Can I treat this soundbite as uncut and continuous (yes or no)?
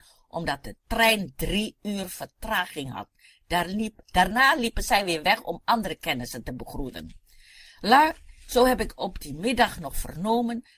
yes